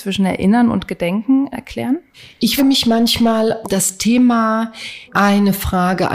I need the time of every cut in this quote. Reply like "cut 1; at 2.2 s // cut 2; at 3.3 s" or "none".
cut 1; at 1.5 s // cut 2; at 2.6 s // cut 3; at 3.6 s // cut 4; at 5.1 s